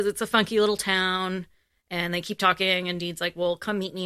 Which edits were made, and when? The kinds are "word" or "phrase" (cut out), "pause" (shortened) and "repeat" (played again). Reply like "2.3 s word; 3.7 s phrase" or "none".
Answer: none